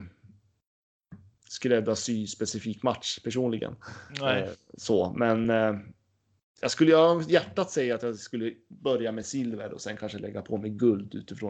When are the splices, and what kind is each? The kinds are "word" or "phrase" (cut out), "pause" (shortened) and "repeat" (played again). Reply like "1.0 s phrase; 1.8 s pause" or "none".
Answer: none